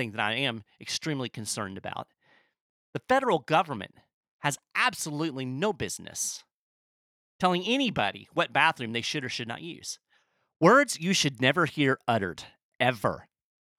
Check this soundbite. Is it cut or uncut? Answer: uncut